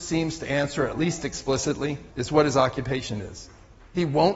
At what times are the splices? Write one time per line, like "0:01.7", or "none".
0:02.1